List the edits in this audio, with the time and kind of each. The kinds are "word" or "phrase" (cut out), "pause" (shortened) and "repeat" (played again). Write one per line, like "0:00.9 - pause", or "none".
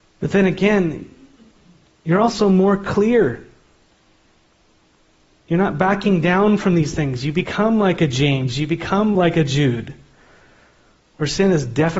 none